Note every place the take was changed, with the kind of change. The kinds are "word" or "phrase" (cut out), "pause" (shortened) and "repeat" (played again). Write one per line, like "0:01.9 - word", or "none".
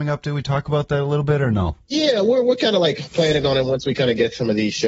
none